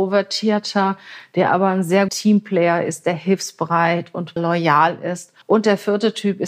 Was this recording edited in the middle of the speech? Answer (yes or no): yes